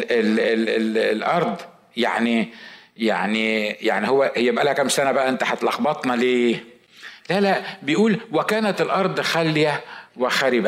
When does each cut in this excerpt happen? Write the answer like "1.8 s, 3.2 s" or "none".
none